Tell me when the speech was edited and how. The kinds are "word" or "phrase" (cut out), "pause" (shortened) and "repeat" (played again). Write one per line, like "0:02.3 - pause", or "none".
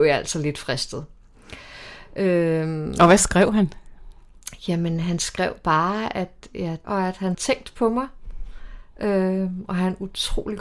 0:06.8 - phrase
0:07.3 - word